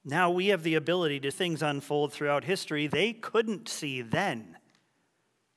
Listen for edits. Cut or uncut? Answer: cut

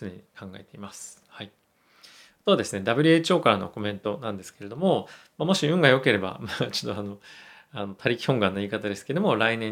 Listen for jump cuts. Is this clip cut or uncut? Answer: uncut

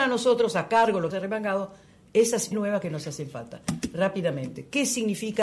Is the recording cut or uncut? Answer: cut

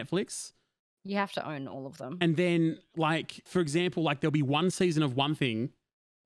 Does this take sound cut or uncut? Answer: cut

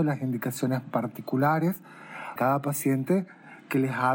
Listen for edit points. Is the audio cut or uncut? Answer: cut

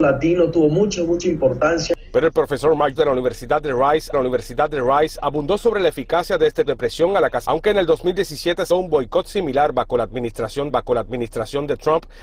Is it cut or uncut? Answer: cut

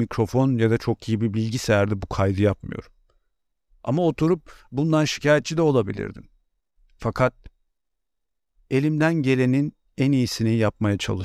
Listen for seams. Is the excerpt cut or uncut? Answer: uncut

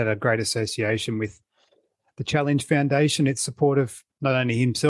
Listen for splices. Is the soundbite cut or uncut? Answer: uncut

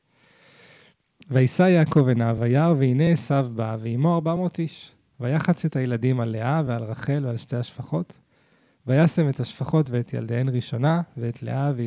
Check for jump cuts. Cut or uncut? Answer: uncut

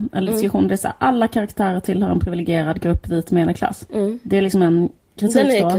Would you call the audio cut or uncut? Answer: uncut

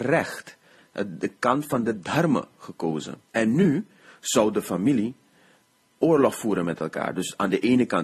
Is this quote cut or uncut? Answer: cut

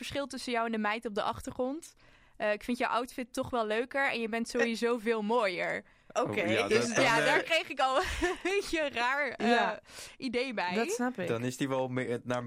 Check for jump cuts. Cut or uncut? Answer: uncut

